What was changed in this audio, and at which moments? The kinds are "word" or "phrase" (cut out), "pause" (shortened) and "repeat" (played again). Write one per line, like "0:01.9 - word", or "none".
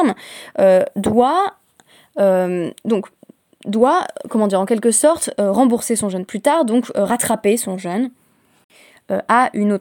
none